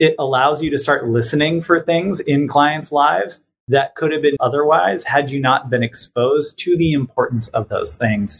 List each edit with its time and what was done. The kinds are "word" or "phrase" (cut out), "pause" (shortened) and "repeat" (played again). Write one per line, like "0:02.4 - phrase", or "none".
0:04.4 - word